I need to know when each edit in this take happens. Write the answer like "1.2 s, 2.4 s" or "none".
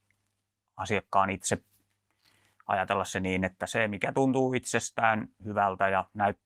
none